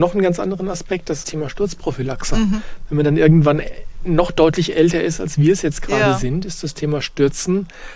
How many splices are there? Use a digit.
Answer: 1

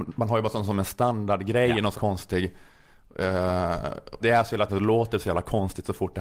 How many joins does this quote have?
3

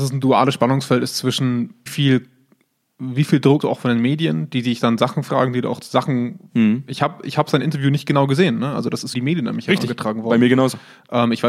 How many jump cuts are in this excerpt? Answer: 3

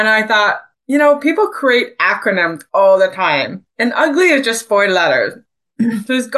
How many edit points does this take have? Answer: 1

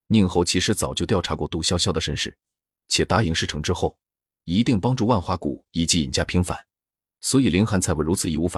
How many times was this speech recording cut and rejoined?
0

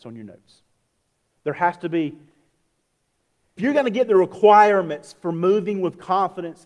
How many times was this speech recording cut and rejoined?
1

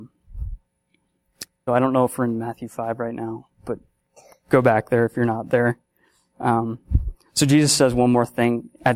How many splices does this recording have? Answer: 2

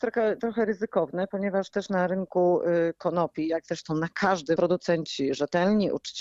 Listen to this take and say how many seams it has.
1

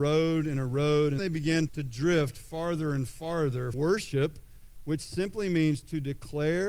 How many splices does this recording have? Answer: 3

